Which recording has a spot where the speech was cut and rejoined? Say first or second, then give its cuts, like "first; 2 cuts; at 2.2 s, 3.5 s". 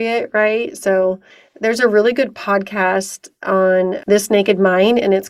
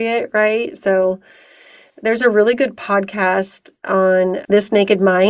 first; 1 cut; at 1.3 s